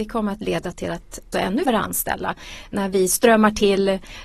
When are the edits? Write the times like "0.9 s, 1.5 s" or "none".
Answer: 1.3 s, 1.7 s